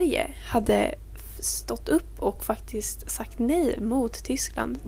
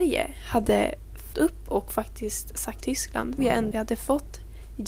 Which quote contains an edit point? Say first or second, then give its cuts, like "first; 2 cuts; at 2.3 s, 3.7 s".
second; 4 cuts; at 1.3 s, 2.8 s, 3.4 s, 3.7 s